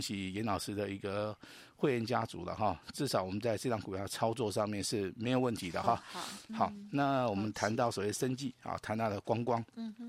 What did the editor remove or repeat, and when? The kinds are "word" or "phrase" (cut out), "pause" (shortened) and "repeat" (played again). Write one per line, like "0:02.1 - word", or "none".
none